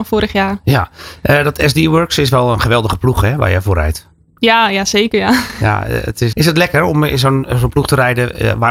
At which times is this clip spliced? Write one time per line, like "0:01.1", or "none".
0:06.3